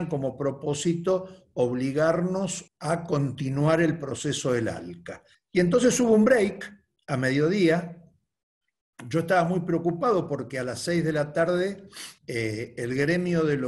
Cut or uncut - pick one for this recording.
cut